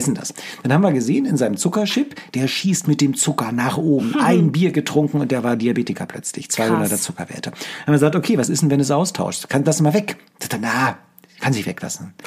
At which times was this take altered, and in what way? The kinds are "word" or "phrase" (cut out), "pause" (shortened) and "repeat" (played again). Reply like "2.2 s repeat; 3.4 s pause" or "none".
10.3 s pause